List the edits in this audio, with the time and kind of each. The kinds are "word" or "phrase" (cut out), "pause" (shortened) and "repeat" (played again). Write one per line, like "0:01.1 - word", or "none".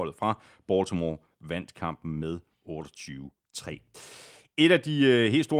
none